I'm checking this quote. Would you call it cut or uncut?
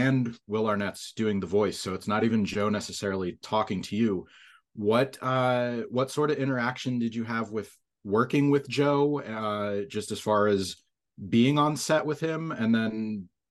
uncut